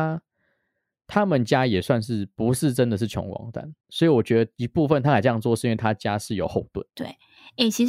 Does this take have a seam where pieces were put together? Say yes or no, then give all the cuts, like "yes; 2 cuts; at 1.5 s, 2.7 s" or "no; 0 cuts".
yes; 2 cuts; at 3.8 s, 6.9 s